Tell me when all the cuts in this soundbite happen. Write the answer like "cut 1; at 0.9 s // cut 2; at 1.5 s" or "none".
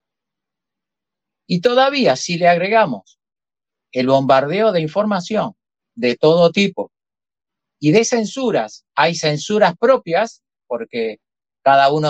cut 1; at 5.7 s // cut 2; at 8.9 s

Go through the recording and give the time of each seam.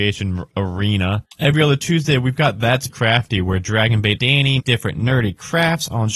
cut 1; at 1.3 s // cut 2; at 2.9 s // cut 3; at 4.2 s // cut 4; at 4.6 s

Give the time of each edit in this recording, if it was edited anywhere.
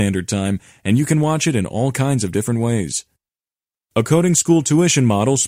none

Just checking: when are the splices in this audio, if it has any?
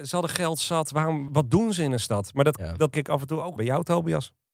cut 1; at 1.3 s // cut 2; at 2.9 s // cut 3; at 3.6 s

